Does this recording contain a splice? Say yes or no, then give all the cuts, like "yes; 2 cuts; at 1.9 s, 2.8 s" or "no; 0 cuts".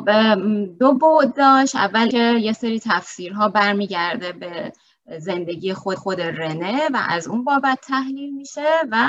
yes; 2 cuts; at 2.1 s, 6.0 s